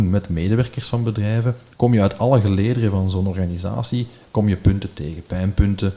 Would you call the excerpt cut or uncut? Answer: uncut